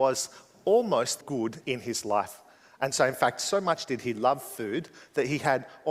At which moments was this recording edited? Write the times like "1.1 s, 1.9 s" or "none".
1.2 s

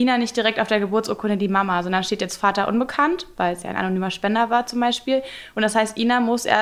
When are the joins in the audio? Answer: none

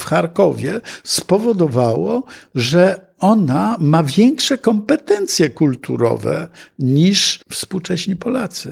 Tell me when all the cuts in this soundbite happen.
7.4 s

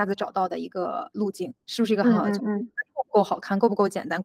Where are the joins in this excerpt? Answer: 1.6 s

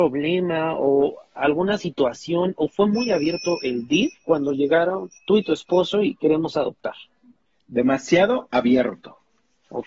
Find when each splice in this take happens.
5.2 s, 7.4 s

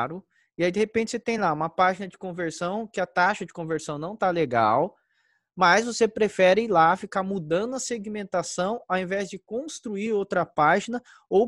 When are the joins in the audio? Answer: none

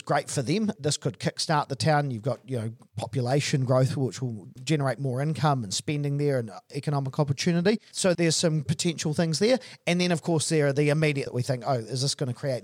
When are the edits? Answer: 8.7 s, 11.3 s

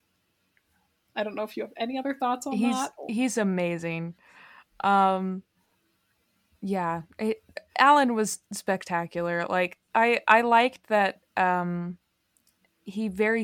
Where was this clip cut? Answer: 5.7 s

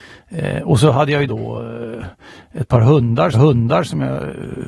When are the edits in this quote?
1.3 s, 3.3 s

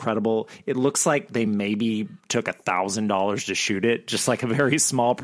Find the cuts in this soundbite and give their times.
none

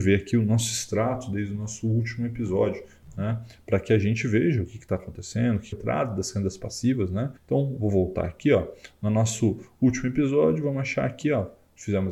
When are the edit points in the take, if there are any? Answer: 5.7 s, 7.4 s

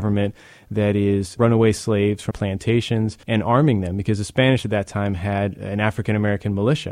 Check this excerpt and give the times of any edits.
1.4 s, 2.3 s, 3.2 s

